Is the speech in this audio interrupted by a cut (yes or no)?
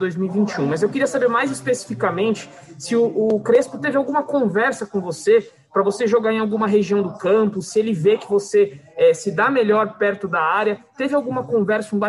no